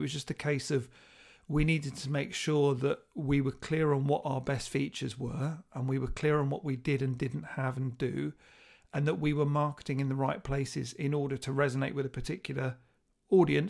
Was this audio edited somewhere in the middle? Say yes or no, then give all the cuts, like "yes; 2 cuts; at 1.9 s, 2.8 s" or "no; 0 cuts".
no; 0 cuts